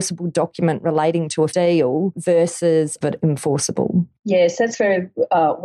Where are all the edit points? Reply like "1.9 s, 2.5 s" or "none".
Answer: 1.5 s, 3.0 s